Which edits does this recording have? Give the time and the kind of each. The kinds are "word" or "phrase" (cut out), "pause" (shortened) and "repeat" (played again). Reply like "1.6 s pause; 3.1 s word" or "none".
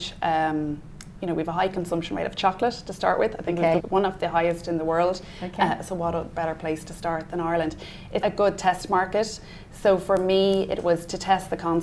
3.8 s phrase; 8.2 s word